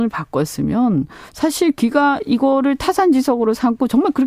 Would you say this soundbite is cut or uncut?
uncut